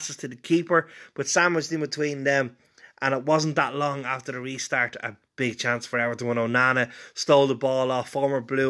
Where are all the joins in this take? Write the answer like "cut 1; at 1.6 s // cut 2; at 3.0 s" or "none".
cut 1; at 5.2 s